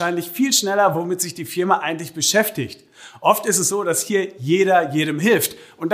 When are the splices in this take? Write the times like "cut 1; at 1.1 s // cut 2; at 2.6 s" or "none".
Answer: none